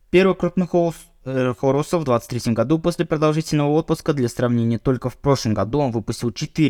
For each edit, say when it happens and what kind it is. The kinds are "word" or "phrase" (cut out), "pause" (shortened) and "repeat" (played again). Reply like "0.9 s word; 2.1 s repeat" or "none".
none